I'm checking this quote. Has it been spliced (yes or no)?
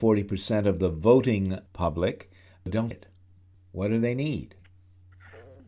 yes